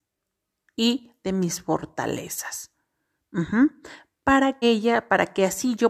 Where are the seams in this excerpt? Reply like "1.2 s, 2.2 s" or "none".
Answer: 1.2 s, 4.6 s